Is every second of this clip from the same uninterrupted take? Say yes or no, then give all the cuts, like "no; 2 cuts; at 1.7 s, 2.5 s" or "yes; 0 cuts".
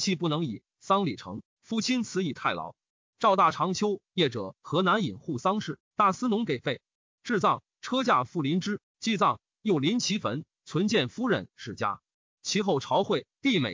yes; 0 cuts